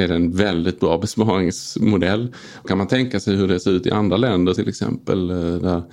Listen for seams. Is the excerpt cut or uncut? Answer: cut